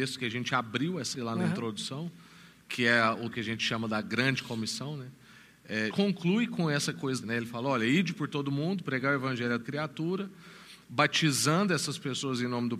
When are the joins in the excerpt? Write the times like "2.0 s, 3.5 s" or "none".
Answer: 1.1 s, 3.3 s, 5.9 s, 7.2 s, 9.6 s